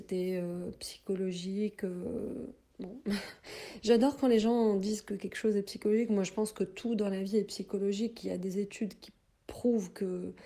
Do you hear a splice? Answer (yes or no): no